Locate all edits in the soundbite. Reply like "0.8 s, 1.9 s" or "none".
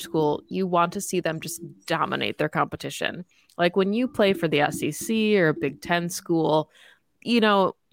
none